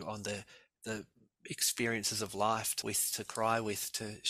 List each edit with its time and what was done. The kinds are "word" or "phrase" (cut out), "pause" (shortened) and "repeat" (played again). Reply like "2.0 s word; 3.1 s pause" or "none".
2.8 s word